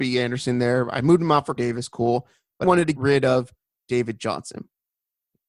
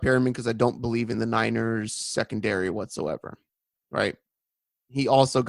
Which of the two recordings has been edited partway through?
first; 3 cuts; at 1.6 s, 2.6 s, 3.0 s

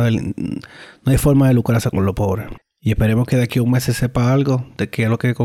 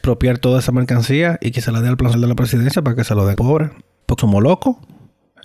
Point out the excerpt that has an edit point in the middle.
second; 4 cuts; at 2.1 s, 2.8 s, 3.4 s, 4.2 s

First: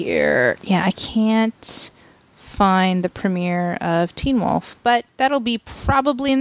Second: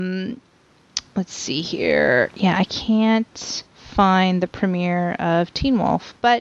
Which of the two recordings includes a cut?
second; 1 cut; at 3.7 s

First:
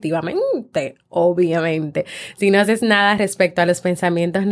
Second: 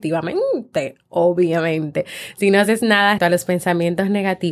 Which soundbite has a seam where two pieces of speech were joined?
second; 1 cut; at 3.2 s

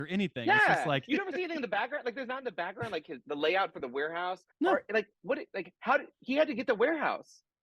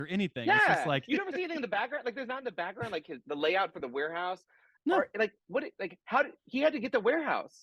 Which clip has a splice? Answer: first; 1 cut; at 4.5 s

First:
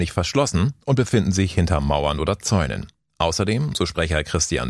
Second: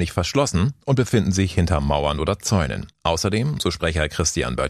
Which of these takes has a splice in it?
second; 1 cut; at 2.9 s

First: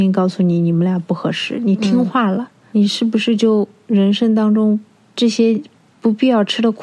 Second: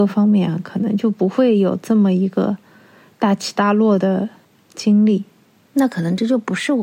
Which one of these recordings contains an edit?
first; 1 cut; at 2.7 s

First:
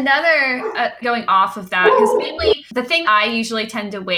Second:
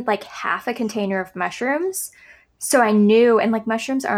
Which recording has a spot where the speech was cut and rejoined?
first; 2 cuts; at 1.0 s, 3.0 s

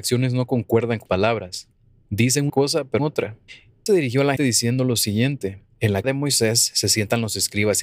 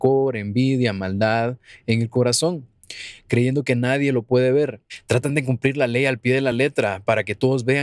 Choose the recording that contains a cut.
first; 6 cuts; at 1.1 s, 2.5 s, 3.0 s, 3.9 s, 4.4 s, 6.0 s

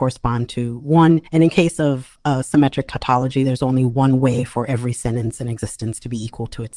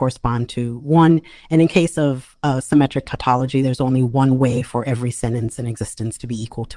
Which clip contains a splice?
first; 1 cut; at 1.3 s

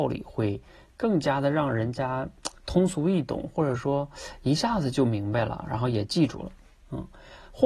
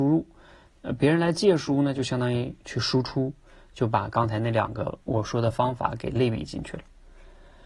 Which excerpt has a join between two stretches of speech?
second; 1 cut; at 5.0 s

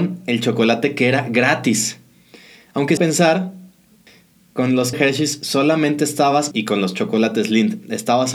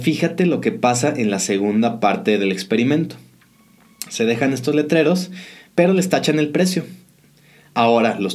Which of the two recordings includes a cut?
first; 3 cuts; at 3.0 s, 4.9 s, 6.5 s

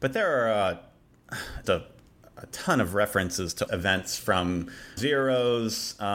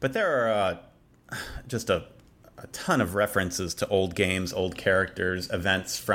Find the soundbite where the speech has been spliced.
first; 3 cuts; at 1.6 s, 3.7 s, 5.0 s

